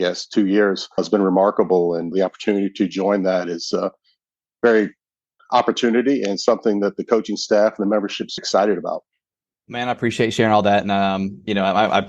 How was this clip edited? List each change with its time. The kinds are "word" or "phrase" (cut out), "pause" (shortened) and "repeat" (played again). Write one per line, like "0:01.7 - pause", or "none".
0:01.0 - word
0:02.1 - word
0:05.4 - word
0:08.4 - word
0:09.3 - pause

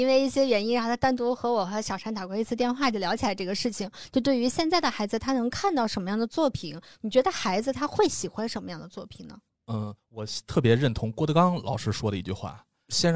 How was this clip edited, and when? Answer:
0:10.0 - pause

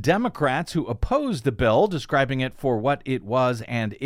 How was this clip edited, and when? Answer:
none

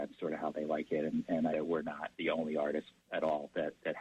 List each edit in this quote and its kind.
0:01.5 - phrase
0:02.1 - pause
0:03.0 - pause

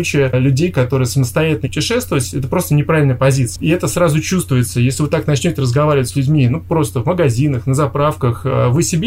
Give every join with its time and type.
0:01.6 - word

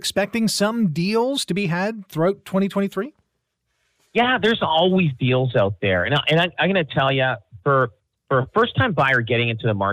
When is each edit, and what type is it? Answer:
none

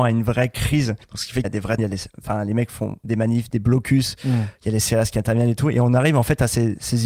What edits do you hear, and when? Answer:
0:01.0 - pause
0:01.4 - phrase
0:01.8 - word

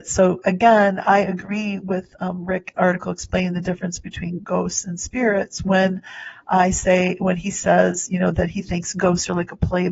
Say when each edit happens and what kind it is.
0:02.7 - phrase

